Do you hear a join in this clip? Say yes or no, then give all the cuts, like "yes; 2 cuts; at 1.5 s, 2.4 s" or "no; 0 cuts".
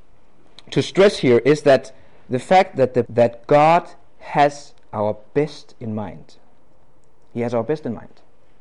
yes; 1 cut; at 3.1 s